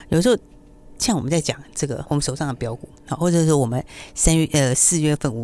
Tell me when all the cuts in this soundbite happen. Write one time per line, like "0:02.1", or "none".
0:02.0